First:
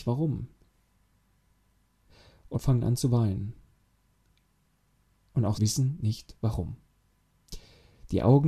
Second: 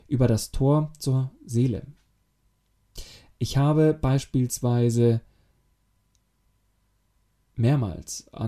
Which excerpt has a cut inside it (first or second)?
first